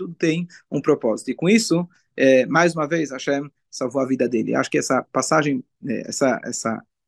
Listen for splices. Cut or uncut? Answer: uncut